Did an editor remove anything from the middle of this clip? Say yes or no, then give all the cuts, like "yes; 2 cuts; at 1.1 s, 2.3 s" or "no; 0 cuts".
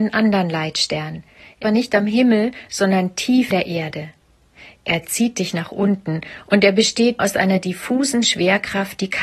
yes; 3 cuts; at 1.6 s, 3.5 s, 7.2 s